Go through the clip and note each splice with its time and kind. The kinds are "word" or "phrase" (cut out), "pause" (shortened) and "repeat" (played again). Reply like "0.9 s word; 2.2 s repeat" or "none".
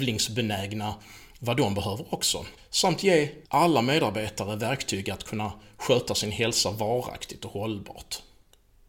2.6 s pause; 3.5 s pause